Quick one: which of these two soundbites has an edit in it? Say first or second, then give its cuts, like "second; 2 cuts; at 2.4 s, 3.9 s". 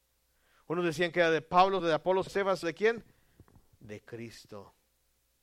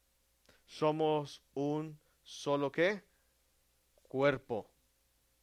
first; 3 cuts; at 1.8 s, 2.3 s, 2.6 s